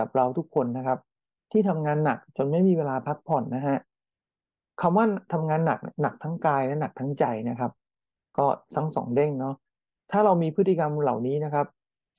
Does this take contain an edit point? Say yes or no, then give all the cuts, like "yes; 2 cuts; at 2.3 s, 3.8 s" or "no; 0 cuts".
no; 0 cuts